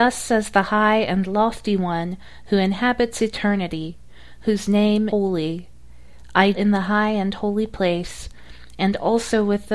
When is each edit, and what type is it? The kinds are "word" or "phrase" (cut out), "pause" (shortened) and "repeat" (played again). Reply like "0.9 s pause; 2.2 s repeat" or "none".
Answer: 5.1 s word; 6.5 s word